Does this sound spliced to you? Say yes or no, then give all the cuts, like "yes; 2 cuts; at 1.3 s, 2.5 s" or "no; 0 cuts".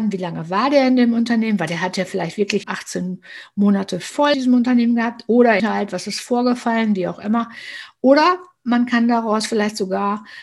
yes; 3 cuts; at 2.6 s, 4.3 s, 5.6 s